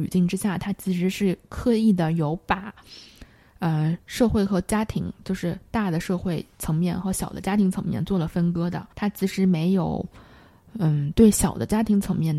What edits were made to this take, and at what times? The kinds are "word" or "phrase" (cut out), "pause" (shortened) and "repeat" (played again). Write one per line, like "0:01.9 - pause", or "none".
0:08.9 - pause